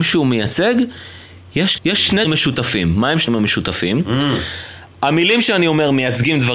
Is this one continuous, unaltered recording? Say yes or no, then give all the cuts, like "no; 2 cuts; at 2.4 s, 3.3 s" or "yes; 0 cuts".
no; 3 cuts; at 1.8 s, 2.2 s, 3.3 s